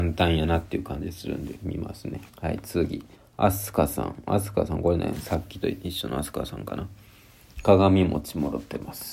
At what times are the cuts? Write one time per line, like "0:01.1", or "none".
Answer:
0:02.3
0:03.1